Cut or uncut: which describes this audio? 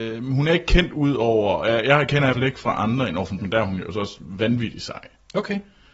cut